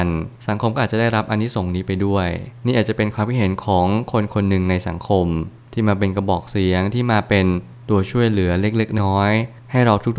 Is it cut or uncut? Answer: cut